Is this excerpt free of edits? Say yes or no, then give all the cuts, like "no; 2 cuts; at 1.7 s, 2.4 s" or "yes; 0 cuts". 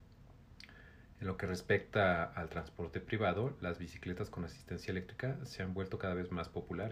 yes; 0 cuts